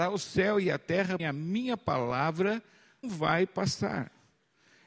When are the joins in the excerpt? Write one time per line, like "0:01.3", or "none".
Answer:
0:01.2
0:03.0